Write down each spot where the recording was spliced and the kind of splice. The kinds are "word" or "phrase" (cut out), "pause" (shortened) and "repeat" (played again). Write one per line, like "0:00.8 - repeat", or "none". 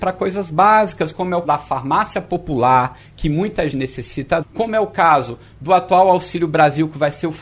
0:01.4 - word
0:03.7 - word
0:04.4 - word